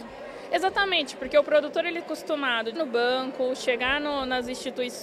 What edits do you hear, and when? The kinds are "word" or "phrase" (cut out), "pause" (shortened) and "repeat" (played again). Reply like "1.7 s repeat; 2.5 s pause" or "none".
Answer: 2.0 s word; 2.7 s word